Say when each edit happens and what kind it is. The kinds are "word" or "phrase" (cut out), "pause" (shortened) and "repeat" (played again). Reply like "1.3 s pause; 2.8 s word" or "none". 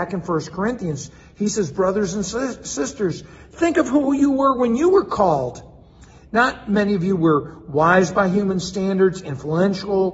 none